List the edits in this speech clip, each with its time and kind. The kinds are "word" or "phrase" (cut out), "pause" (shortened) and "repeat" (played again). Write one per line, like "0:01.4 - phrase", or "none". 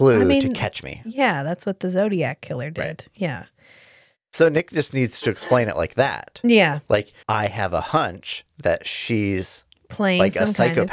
0:07.2 - pause